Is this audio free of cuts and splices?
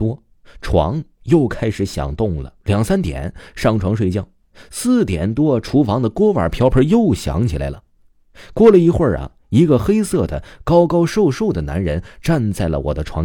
no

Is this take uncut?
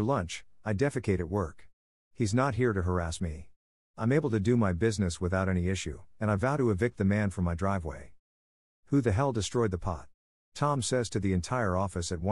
yes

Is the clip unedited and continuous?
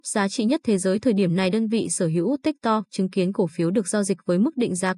yes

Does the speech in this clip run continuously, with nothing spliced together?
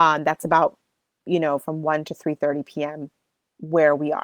yes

